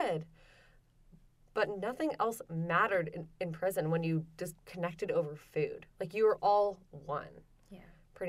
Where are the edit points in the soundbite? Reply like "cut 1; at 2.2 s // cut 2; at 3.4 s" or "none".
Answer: cut 1; at 4.6 s